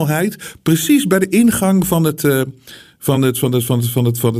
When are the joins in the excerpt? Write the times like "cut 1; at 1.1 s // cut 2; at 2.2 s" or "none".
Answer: none